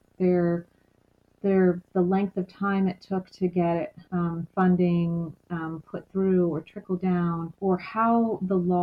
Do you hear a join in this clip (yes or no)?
yes